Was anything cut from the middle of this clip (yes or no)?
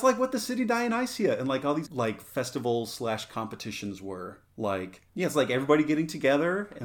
yes